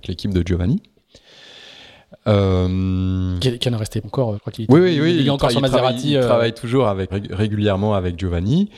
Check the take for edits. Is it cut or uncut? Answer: cut